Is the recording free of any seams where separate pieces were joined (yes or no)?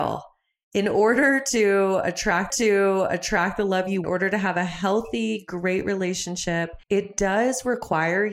no